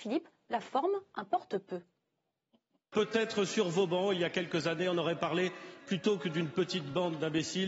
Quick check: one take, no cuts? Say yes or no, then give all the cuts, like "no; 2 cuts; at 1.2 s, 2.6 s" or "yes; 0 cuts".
yes; 0 cuts